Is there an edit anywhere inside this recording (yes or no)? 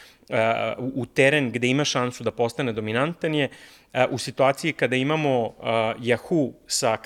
no